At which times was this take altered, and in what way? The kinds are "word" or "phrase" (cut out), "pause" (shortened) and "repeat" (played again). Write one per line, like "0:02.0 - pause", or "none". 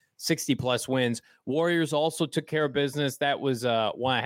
none